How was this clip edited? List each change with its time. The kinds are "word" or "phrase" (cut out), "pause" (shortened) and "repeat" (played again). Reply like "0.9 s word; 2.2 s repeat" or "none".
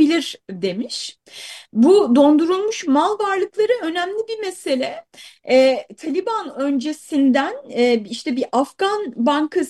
none